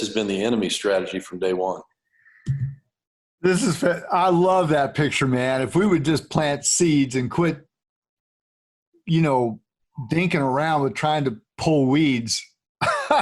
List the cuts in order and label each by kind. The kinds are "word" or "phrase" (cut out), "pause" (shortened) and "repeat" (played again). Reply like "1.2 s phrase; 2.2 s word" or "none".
none